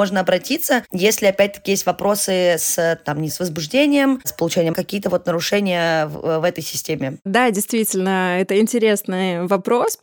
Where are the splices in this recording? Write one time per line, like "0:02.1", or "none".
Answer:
0:03.3
0:04.7